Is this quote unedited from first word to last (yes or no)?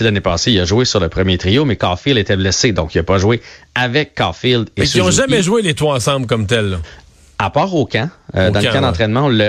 yes